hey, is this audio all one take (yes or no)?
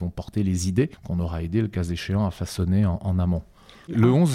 no